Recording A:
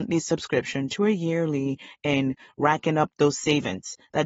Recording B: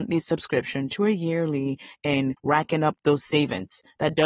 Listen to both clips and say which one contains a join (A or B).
B